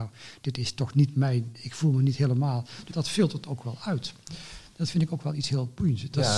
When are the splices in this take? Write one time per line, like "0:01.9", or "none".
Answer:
0:02.9